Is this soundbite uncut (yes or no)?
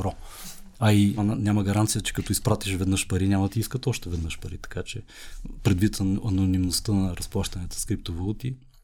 no